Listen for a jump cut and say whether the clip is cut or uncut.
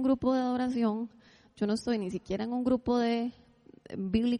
uncut